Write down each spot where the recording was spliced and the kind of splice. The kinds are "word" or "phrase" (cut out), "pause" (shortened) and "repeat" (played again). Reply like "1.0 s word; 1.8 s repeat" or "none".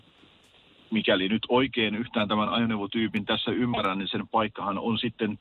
none